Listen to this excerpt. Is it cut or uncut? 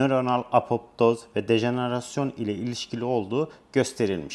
uncut